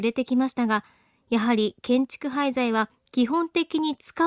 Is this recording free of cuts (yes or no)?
yes